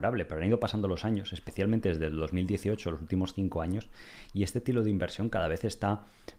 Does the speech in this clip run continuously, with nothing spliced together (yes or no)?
yes